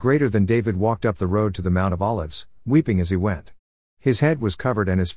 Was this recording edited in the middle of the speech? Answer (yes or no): no